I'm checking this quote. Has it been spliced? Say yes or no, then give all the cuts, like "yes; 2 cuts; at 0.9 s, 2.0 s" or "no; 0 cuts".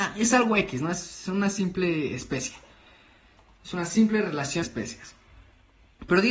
yes; 1 cut; at 4.6 s